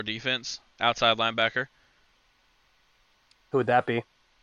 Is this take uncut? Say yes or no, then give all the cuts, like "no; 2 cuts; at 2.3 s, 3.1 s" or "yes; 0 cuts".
yes; 0 cuts